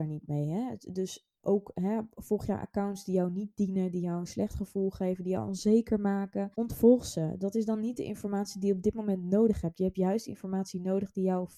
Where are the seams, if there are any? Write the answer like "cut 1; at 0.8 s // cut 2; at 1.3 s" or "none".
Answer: cut 1; at 6.5 s